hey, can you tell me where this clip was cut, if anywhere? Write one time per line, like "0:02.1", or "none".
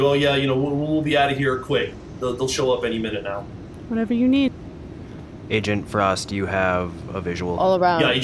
none